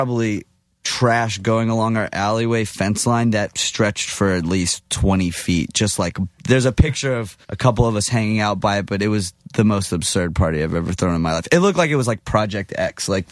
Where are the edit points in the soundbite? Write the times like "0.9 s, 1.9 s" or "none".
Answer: 6.4 s, 7.4 s